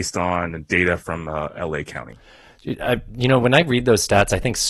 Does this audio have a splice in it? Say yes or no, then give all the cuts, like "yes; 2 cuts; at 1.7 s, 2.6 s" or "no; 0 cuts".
no; 0 cuts